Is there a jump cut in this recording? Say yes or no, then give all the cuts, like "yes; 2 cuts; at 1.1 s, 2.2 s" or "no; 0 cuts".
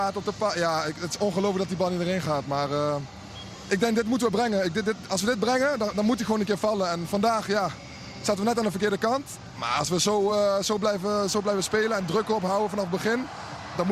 no; 0 cuts